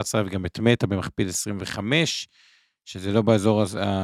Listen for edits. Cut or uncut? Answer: uncut